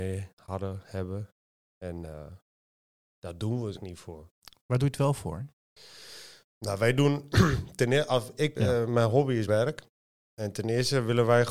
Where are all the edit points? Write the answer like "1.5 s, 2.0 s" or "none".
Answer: 3.7 s, 8.5 s, 9.5 s